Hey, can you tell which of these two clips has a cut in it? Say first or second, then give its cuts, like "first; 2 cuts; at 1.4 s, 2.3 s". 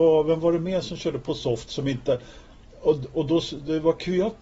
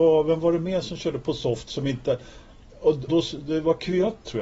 second; 1 cut; at 3.1 s